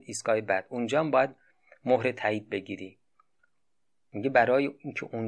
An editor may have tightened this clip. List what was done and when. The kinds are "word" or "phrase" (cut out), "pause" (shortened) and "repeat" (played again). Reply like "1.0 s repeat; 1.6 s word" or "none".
none